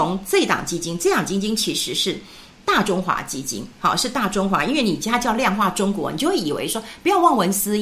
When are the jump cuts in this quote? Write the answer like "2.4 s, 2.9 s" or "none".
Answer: none

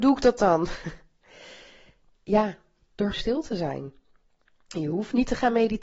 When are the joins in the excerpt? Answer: 3.1 s

